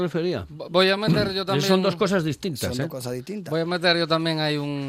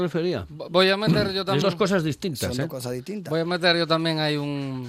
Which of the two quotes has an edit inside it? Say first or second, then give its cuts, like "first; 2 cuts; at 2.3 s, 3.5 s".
second; 1 cut; at 1.6 s